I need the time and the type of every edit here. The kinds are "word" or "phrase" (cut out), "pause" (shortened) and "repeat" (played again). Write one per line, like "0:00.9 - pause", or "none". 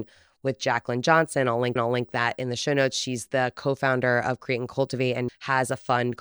0:01.8 - repeat
0:05.3 - word